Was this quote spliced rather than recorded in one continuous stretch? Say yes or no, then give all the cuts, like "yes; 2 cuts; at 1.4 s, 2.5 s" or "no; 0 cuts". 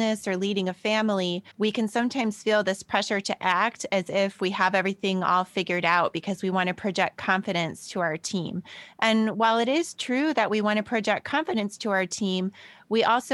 yes; 1 cut; at 1.5 s